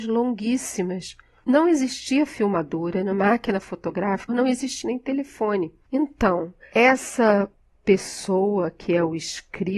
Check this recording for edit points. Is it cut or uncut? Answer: cut